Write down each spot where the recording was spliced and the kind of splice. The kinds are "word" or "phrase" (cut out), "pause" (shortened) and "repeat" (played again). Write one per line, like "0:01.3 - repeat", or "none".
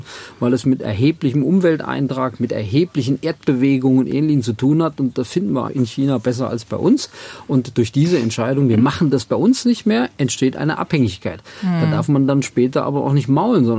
0:05.7 - word